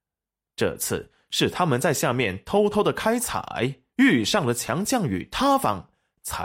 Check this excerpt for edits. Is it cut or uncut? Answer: cut